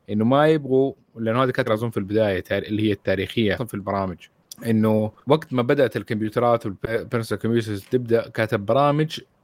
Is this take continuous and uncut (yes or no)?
no